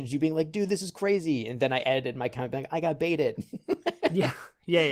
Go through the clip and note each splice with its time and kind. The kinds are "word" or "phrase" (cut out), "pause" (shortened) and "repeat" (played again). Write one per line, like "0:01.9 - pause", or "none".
none